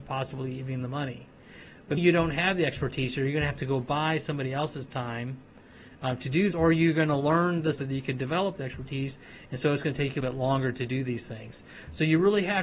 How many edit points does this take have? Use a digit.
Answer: 4